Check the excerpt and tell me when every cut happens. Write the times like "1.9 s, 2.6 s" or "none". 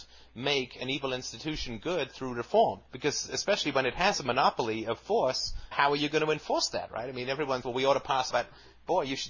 2.9 s, 5.7 s, 7.6 s, 8.3 s